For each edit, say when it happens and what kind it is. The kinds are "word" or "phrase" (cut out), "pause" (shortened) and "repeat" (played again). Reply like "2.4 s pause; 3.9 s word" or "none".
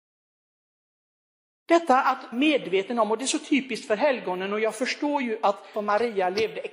2.3 s word; 5.7 s word